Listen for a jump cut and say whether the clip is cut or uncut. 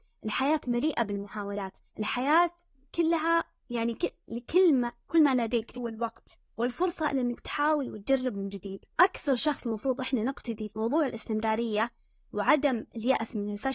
cut